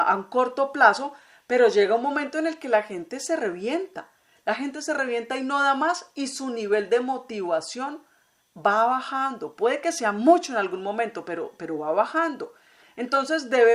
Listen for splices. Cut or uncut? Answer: uncut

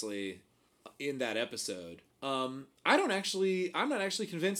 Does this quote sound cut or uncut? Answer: cut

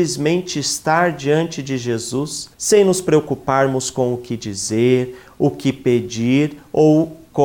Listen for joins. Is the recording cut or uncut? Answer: cut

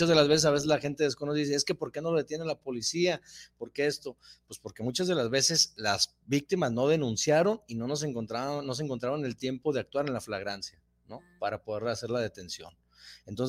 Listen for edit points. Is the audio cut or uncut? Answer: uncut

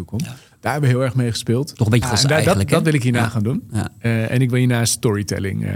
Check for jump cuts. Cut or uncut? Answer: cut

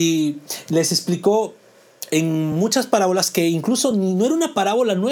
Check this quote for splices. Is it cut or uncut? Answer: uncut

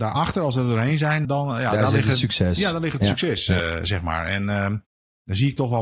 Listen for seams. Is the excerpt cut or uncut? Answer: cut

